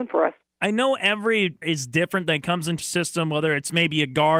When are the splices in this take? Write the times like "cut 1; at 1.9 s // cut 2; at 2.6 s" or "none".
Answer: cut 1; at 1.6 s // cut 2; at 2.8 s